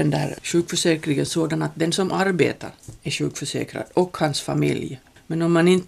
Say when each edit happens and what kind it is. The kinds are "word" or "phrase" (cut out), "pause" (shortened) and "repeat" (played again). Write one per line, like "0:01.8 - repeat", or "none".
none